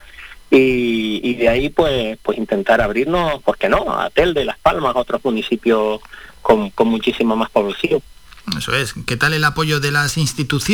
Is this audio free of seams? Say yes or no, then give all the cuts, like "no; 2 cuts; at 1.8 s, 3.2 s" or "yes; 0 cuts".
yes; 0 cuts